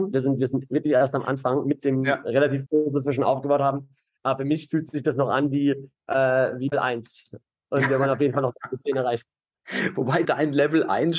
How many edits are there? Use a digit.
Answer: 4